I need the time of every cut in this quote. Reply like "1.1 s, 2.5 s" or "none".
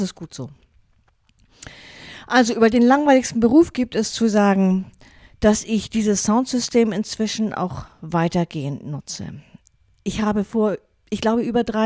none